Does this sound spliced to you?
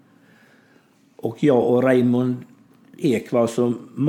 no; 0 cuts

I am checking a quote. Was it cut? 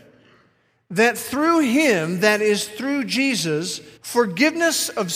yes; 1 cut; at 4.0 s

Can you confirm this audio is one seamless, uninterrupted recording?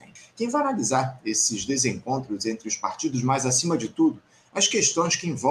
yes; 0 cuts

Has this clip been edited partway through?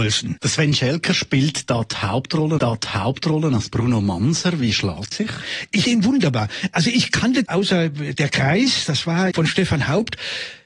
yes; 5 cuts; at 2.6 s, 5.1 s, 5.8 s, 7.5 s, 9.3 s

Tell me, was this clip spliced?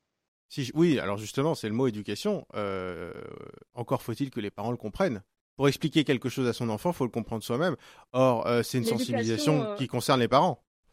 no; 0 cuts

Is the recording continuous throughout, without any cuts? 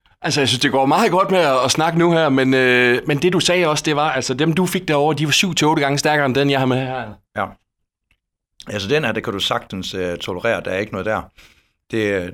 yes; 0 cuts

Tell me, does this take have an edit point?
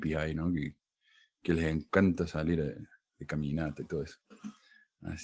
no; 0 cuts

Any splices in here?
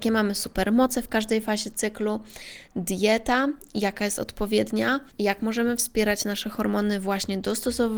no; 0 cuts

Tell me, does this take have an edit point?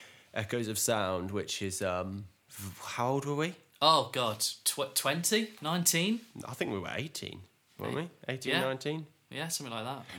no; 0 cuts

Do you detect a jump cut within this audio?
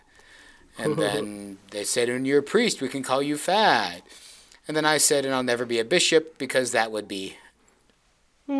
no; 0 cuts

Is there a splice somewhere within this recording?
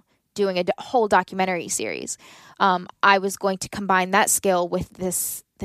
no; 0 cuts

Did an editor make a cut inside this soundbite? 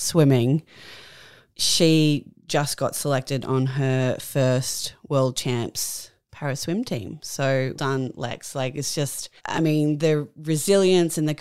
yes; 3 cuts; at 1.5 s, 7.7 s, 9.4 s

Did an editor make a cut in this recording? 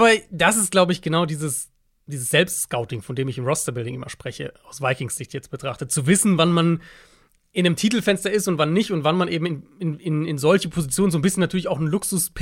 no; 0 cuts

